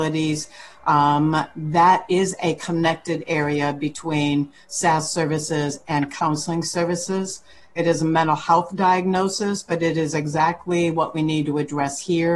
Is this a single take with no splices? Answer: yes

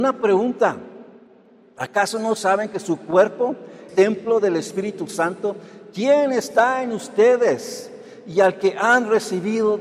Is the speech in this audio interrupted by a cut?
yes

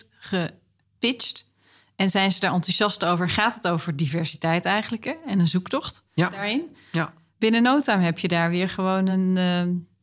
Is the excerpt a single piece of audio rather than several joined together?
yes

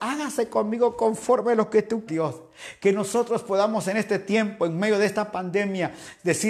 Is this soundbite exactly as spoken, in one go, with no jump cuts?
no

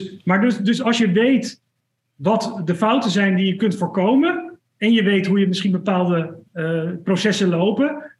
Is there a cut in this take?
no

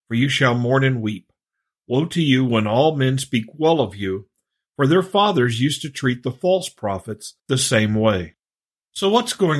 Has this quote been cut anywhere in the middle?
yes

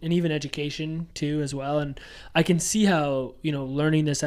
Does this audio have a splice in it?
no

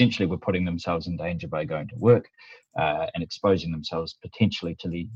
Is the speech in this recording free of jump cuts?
yes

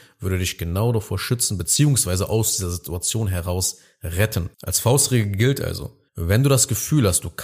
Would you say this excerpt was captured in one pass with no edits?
no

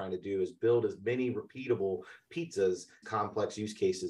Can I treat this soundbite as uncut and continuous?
no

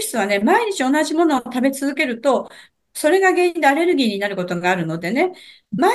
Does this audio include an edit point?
no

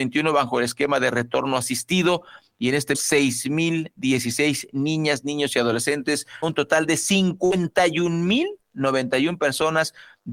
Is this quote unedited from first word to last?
no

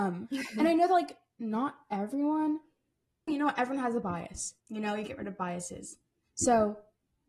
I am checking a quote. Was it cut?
yes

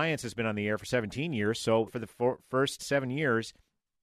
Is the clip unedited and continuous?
no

